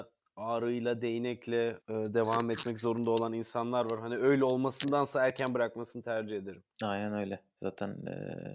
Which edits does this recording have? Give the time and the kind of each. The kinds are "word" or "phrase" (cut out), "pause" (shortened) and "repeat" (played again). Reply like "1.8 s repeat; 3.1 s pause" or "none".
1.8 s pause; 6.7 s pause